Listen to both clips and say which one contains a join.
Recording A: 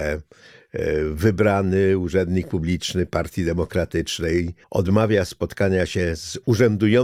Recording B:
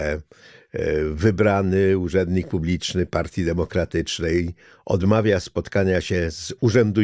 A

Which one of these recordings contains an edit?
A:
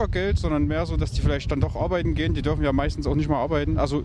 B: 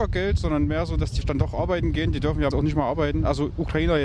B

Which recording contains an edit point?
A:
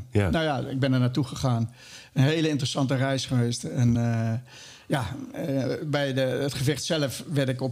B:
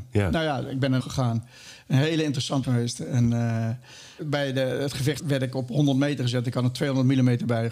B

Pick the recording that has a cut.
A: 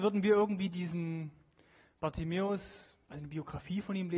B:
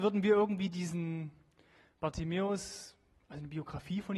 A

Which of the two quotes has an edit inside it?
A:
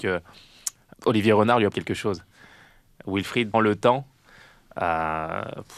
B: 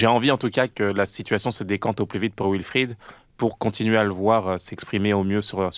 A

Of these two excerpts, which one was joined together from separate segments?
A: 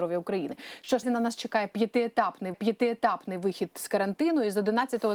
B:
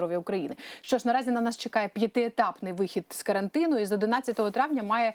A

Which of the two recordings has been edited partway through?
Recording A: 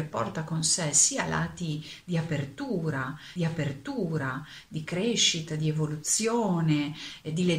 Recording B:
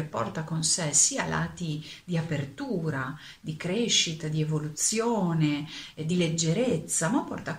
A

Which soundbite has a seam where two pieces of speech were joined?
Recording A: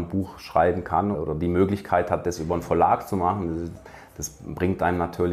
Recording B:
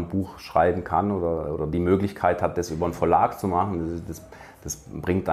A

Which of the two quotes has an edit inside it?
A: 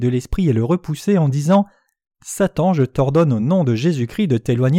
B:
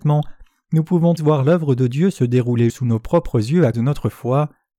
B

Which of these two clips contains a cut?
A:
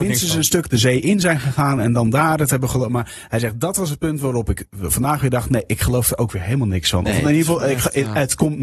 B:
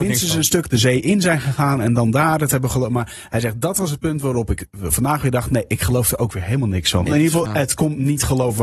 B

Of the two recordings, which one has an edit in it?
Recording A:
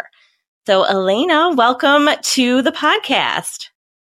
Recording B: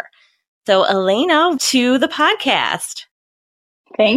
B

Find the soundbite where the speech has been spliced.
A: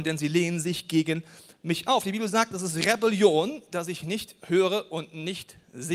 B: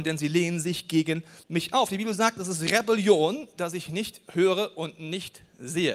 B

